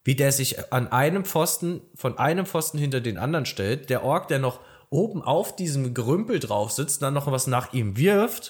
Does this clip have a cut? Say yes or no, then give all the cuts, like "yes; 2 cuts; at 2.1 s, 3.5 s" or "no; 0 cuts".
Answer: no; 0 cuts